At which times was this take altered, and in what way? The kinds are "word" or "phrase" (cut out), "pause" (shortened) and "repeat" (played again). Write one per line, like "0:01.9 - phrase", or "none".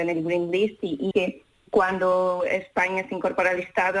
0:01.1 - word